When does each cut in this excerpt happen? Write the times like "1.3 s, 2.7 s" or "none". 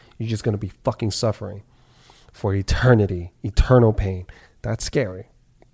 none